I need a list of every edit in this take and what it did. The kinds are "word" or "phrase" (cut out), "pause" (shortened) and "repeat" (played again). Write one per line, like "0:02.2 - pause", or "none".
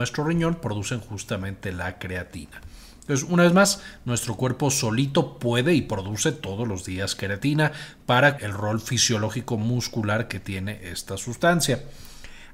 0:08.4 - word